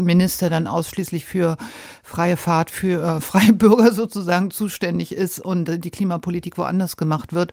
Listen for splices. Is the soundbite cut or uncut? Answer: uncut